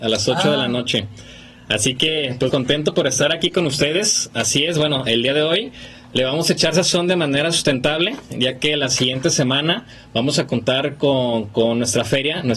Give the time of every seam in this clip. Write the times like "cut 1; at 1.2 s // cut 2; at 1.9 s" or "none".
cut 1; at 2.5 s